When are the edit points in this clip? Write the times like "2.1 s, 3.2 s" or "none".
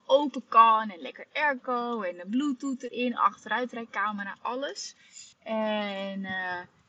5.3 s